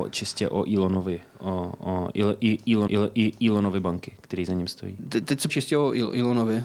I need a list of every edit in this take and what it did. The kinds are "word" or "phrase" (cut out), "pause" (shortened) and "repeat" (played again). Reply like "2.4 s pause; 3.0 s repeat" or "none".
2.9 s repeat; 5.5 s word